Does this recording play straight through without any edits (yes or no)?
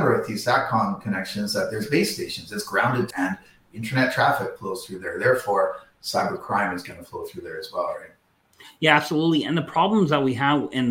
no